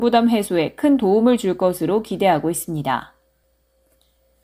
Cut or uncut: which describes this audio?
uncut